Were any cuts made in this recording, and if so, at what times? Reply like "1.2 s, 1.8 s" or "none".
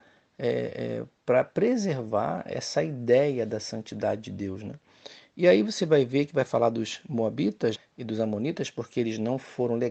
7.8 s